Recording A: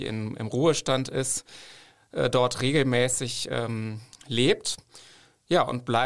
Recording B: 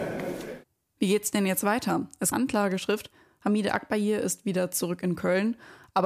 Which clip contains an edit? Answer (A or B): B